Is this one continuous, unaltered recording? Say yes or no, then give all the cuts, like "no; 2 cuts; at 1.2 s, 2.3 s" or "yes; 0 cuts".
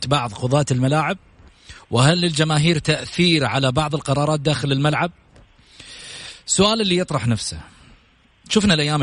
yes; 0 cuts